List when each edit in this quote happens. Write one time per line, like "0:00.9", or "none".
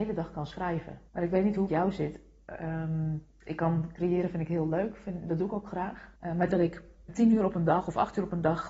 0:01.1
0:01.7
0:06.1
0:06.5
0:07.1